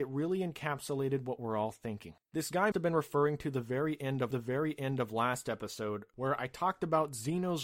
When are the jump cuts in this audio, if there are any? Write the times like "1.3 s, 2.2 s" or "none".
2.2 s, 2.7 s, 4.3 s